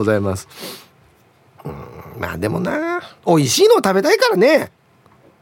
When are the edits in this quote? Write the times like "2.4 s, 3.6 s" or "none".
3.2 s